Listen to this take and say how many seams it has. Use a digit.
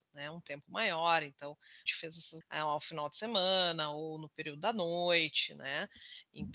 2